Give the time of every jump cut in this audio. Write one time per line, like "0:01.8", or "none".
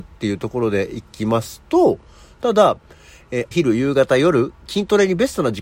0:03.5